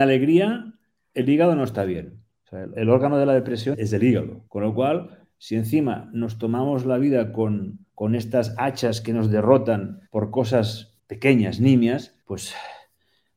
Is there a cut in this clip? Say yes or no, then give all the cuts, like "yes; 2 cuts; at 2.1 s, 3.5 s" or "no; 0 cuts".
yes; 7 cuts; at 2.7 s, 3.7 s, 4.5 s, 7.9 s, 10.1 s, 11.0 s, 12.2 s